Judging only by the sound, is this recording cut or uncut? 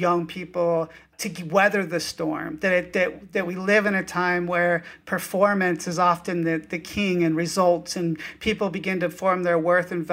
uncut